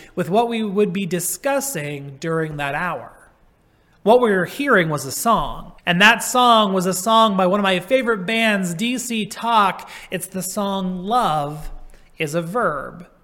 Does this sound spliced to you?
yes; 2 cuts; at 3.5 s, 5.8 s

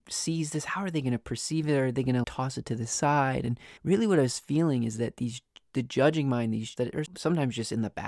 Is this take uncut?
no; 4 cuts; at 2.2 s, 3.8 s, 6.8 s, 7.1 s

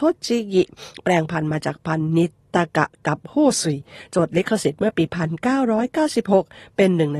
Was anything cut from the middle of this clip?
no; 0 cuts

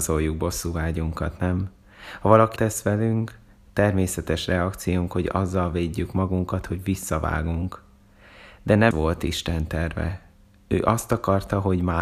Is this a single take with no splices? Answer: no; 2 cuts; at 2.6 s, 8.9 s

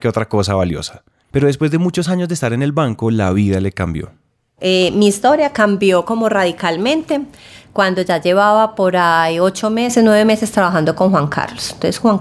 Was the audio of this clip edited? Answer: no; 0 cuts

